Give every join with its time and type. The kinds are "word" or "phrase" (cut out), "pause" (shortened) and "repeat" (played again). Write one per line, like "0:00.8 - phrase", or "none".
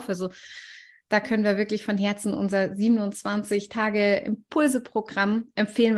none